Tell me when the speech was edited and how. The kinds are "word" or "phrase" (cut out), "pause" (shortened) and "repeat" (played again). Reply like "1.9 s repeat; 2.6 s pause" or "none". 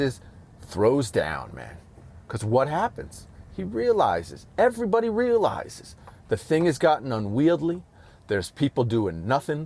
none